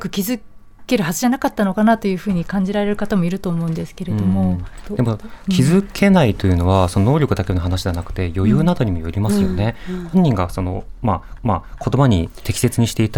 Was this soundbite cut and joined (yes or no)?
yes